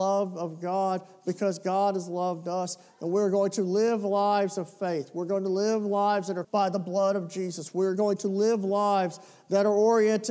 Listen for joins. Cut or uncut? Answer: cut